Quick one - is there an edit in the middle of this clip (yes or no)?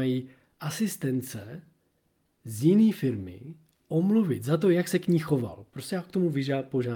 no